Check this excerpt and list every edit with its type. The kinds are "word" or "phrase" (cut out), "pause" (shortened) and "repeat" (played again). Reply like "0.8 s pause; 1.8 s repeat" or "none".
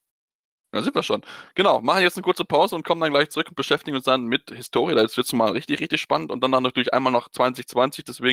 none